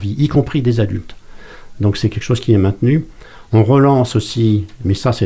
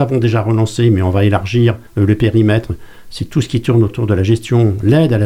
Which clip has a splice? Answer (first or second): second